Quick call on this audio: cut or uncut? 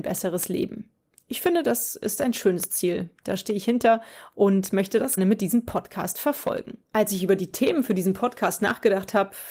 cut